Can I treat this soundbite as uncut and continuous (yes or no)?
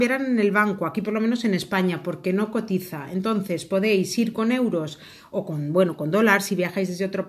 yes